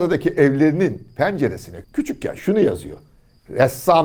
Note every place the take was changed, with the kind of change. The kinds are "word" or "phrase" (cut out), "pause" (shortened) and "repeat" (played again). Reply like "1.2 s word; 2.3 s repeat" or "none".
1.8 s word